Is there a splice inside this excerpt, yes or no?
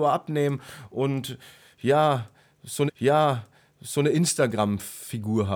yes